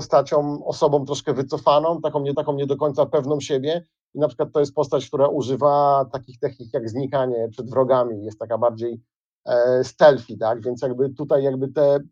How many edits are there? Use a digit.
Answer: 1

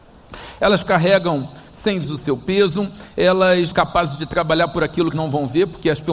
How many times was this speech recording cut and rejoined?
3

